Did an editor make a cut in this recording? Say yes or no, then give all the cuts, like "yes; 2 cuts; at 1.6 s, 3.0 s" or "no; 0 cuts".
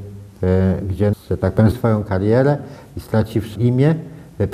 yes; 3 cuts; at 1.1 s, 1.7 s, 3.6 s